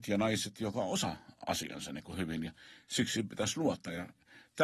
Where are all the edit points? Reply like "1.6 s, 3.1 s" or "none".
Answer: none